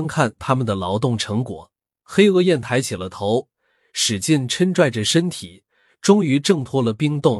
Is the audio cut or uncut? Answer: uncut